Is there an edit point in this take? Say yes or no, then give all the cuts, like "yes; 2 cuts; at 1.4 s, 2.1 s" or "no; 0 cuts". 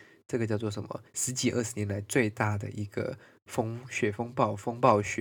yes; 1 cut; at 1.1 s